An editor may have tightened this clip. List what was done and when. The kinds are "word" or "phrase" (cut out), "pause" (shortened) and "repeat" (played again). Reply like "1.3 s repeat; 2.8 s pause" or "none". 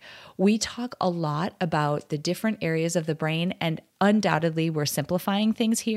3.9 s pause